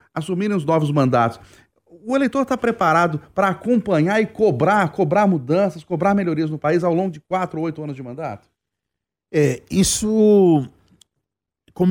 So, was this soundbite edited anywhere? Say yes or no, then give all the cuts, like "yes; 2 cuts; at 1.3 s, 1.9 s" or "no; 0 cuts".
no; 0 cuts